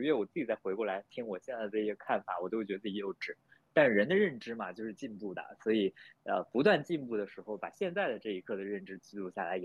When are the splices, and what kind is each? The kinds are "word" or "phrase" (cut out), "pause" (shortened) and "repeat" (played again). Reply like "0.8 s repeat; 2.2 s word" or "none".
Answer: none